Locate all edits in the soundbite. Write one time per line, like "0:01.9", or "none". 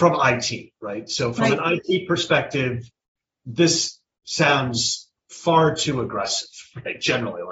none